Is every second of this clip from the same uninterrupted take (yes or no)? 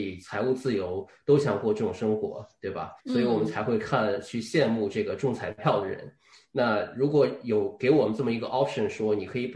no